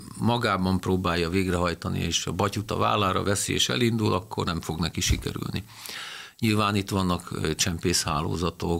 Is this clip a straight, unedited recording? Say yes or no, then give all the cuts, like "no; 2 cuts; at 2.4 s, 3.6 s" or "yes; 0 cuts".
yes; 0 cuts